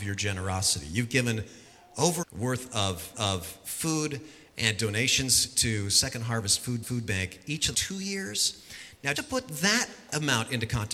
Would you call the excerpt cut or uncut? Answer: cut